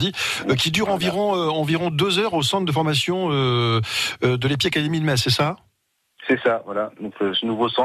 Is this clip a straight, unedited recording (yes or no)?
yes